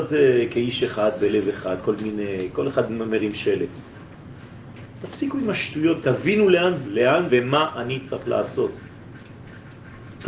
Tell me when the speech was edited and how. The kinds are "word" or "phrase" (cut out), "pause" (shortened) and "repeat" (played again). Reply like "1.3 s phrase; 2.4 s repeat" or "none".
6.0 s word; 6.8 s word; 7.3 s phrase